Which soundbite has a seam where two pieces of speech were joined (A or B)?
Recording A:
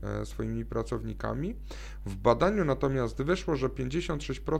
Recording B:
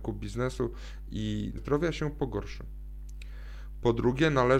B